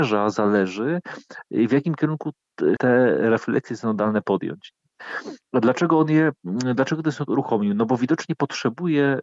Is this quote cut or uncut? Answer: cut